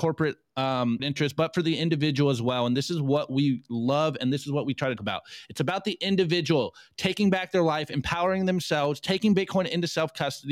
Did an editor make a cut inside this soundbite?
yes; 2 cuts; at 1.0 s, 5.0 s

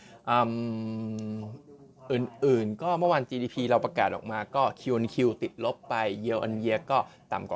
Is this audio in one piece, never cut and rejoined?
yes; 0 cuts

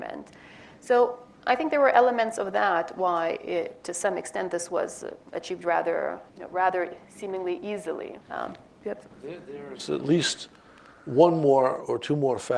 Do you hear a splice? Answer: yes; 3 cuts; at 6.3 s, 8.2 s, 9.1 s

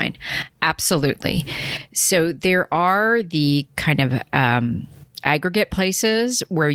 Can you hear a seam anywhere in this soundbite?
no; 0 cuts

